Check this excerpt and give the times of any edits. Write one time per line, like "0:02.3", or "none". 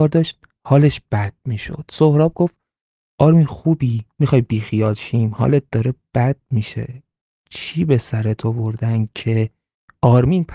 none

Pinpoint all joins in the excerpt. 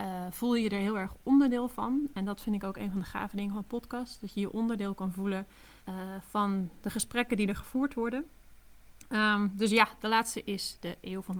0:05.8

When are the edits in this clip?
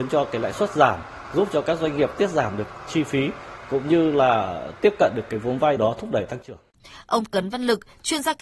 0:05.8

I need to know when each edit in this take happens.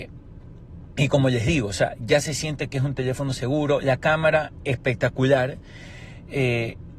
none

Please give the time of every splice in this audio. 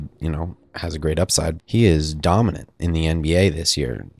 0:01.6
0:02.8

